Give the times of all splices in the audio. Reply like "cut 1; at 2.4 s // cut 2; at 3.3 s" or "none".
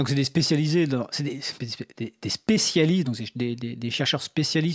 none